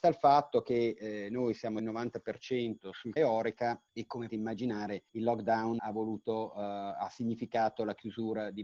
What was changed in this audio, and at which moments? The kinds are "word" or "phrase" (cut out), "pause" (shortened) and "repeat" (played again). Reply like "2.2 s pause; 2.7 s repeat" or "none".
1.8 s phrase; 3.2 s word; 3.9 s pause; 4.3 s word; 5.1 s pause; 5.8 s word